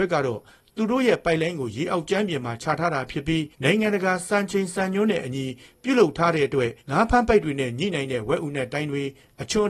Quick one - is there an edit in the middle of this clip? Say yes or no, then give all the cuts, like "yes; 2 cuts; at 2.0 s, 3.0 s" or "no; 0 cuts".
yes; 2 cuts; at 3.5 s, 6.8 s